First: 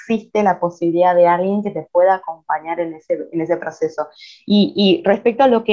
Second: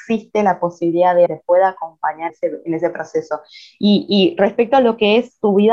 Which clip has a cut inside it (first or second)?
second